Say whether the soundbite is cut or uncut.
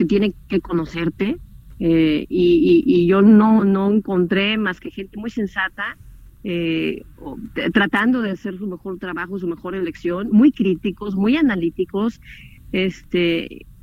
cut